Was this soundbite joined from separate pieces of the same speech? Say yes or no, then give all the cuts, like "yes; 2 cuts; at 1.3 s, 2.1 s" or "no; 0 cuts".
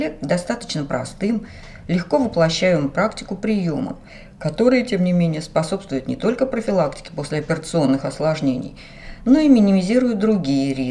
no; 0 cuts